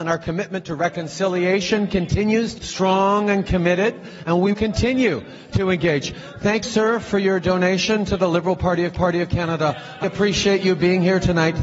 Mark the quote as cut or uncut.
cut